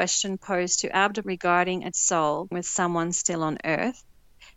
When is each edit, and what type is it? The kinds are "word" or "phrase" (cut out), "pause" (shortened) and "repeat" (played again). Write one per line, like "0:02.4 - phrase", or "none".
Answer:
0:01.2 - word
0:01.9 - word
0:02.5 - word